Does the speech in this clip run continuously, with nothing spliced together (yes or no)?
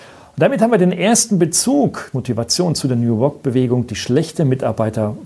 no